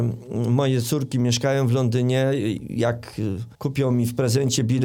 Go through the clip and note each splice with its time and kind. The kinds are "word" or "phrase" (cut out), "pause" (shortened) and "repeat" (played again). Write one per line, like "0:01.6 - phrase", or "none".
0:03.5 - pause